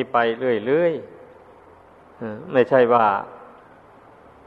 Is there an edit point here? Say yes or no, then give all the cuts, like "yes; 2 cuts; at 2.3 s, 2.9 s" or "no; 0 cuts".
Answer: no; 0 cuts